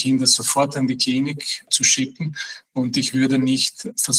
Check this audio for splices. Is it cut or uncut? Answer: uncut